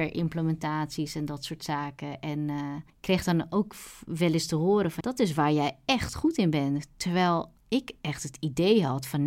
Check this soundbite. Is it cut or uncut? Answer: cut